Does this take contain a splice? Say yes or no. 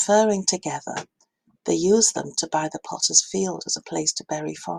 no